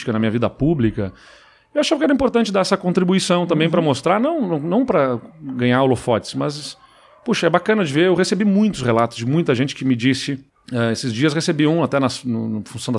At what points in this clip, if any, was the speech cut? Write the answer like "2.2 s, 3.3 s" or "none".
5.3 s, 10.5 s